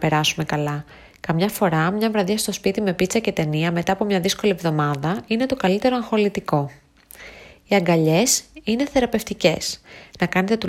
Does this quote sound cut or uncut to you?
uncut